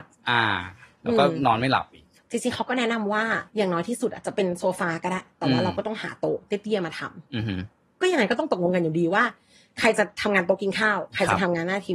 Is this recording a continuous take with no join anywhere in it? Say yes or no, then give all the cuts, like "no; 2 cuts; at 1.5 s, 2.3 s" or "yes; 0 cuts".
no; 1 cut; at 3.5 s